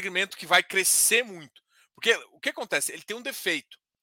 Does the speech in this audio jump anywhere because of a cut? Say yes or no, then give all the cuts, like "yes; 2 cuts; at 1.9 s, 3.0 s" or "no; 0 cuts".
no; 0 cuts